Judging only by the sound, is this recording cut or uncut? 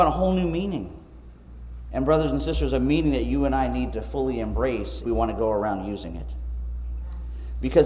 cut